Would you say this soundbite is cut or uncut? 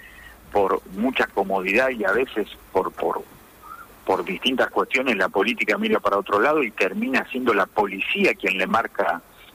uncut